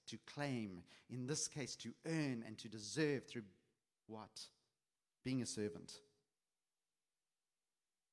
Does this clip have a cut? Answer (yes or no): no